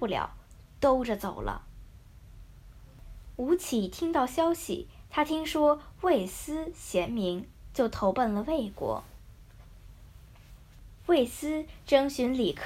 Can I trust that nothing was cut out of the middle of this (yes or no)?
no